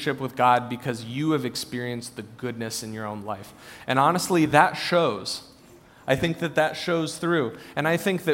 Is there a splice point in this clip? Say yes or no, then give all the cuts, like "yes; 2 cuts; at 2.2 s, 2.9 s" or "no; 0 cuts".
no; 0 cuts